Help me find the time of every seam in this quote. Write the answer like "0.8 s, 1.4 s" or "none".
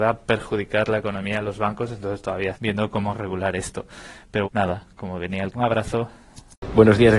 2.5 s, 4.4 s, 5.5 s